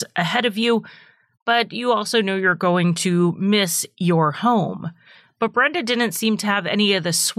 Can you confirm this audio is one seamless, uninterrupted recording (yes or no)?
yes